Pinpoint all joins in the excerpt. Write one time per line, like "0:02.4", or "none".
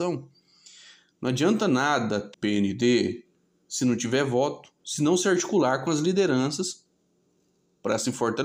0:02.3